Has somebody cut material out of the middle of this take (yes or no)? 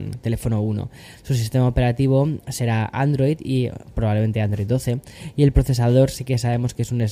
no